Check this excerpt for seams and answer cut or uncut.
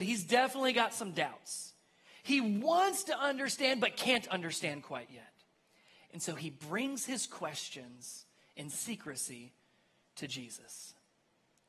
uncut